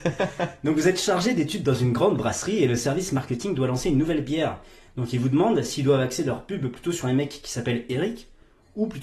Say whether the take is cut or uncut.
uncut